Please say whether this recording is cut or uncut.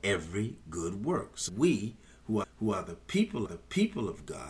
cut